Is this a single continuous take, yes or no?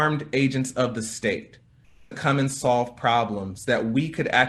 no